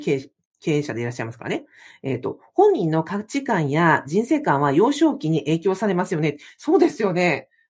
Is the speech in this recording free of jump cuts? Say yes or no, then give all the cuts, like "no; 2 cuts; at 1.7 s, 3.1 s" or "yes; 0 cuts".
yes; 0 cuts